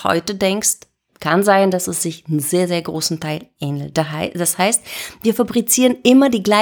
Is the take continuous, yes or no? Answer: yes